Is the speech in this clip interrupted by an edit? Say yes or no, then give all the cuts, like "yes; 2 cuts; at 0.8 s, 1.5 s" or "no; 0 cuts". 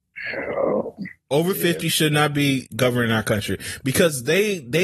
yes; 1 cut; at 1.3 s